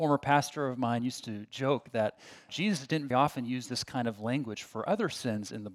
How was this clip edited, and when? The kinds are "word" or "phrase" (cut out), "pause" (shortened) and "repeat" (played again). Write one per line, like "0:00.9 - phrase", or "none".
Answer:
0:02.5 - word
0:03.1 - word